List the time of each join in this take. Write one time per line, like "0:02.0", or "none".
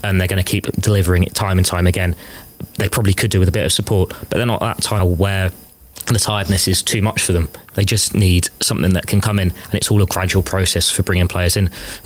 0:05.0